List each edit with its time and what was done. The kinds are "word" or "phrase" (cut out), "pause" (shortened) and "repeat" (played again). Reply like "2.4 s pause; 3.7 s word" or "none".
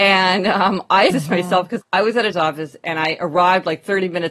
1.1 s word; 1.8 s word; 2.3 s word